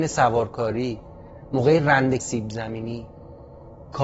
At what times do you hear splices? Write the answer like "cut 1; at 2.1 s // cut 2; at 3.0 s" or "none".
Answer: cut 1; at 2.2 s